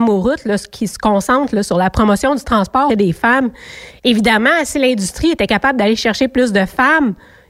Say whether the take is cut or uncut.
cut